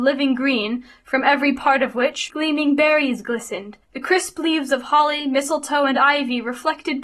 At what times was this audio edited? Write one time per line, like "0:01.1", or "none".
0:02.3
0:03.8